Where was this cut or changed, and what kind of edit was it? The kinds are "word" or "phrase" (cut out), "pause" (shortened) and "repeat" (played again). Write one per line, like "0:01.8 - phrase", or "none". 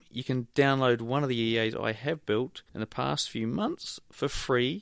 0:02.7 - pause